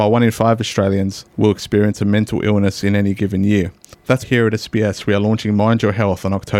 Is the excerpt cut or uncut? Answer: cut